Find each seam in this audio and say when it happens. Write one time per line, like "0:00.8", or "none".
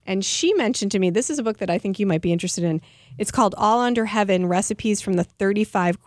none